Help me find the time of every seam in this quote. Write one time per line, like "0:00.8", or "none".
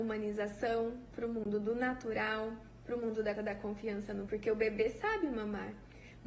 0:03.4
0:04.3